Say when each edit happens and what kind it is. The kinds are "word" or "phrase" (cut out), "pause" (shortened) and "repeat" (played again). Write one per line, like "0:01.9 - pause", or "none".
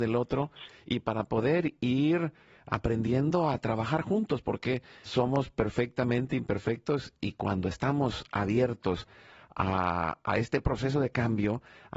0:05.1 - word